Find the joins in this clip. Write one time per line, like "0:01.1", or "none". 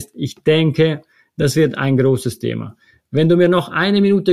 none